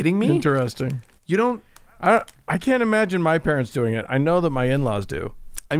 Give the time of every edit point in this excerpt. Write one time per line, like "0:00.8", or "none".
none